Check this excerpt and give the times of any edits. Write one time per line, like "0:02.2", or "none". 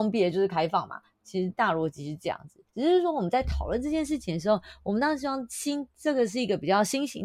0:02.7